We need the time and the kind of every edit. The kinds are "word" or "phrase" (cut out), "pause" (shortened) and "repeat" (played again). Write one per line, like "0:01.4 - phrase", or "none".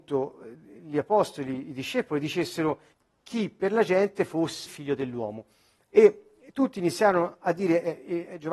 0:02.9 - pause
0:04.7 - word